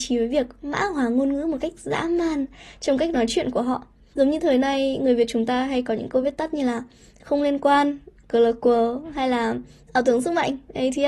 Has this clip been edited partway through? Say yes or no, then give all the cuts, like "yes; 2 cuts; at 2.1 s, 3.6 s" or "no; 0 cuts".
no; 0 cuts